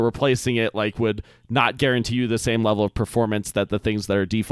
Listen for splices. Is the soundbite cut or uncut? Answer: uncut